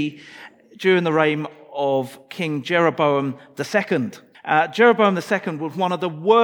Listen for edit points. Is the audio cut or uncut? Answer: cut